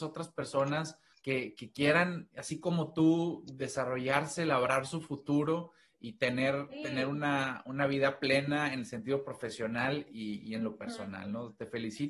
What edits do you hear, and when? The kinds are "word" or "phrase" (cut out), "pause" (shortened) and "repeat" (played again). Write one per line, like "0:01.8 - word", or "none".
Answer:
0:01.1 - pause